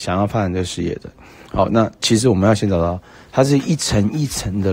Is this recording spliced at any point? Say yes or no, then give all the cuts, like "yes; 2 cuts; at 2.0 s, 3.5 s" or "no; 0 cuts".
no; 0 cuts